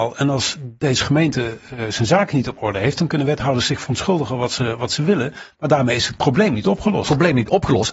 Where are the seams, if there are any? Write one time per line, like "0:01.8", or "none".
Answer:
none